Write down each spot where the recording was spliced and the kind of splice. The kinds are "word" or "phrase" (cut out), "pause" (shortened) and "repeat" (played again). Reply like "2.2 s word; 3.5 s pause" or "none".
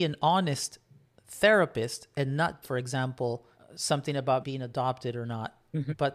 2.6 s word; 3.5 s pause; 4.4 s word

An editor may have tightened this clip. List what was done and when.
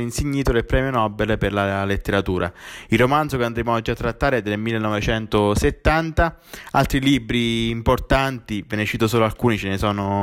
none

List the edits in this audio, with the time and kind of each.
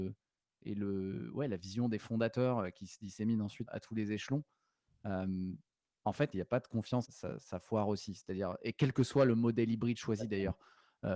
3.7 s word; 6.3 s phrase; 7.0 s word

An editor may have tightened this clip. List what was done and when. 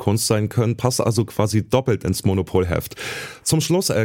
none

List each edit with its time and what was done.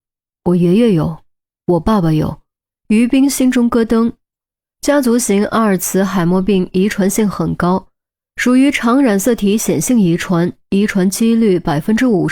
2.6 s pause

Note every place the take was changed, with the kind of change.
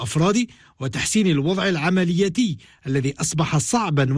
none

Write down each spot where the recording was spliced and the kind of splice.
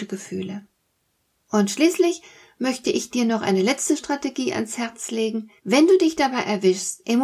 5.6 s pause

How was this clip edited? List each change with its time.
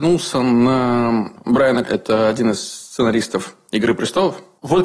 1.4 s word; 1.8 s word

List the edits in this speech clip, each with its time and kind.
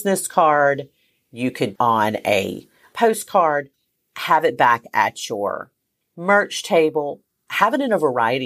1.8 s phrase

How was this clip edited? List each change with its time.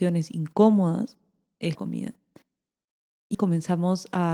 1.7 s word; 3.3 s word

